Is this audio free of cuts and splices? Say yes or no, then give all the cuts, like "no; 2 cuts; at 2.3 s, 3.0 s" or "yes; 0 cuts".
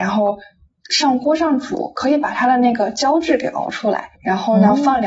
no; 1 cut; at 4.2 s